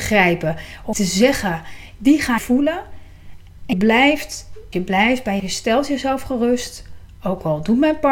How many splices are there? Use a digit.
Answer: 5